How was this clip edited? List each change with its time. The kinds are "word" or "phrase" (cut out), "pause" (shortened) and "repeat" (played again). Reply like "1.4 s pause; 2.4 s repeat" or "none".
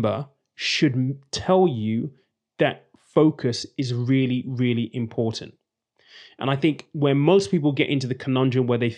none